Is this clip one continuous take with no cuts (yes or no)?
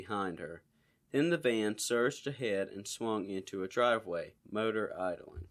no